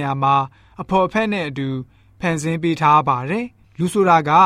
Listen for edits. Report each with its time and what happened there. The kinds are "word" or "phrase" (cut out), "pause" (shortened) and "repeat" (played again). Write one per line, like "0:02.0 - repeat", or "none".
none